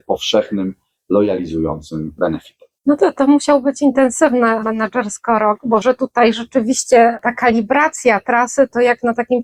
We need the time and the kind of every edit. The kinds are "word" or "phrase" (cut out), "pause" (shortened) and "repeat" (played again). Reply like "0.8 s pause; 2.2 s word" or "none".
2.8 s pause; 5.8 s word